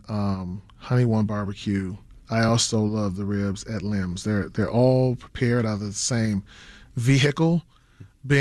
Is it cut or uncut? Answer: uncut